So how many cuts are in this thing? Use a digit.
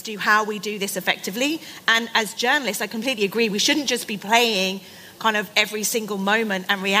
0